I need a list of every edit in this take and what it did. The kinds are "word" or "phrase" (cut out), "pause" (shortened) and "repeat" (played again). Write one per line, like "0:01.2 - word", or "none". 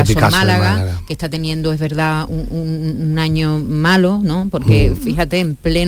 none